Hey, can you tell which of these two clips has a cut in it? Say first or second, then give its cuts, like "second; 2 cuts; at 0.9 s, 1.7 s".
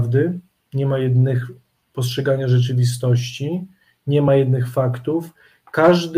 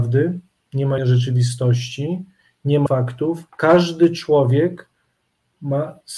second; 3 cuts; at 1.0 s, 2.9 s, 3.5 s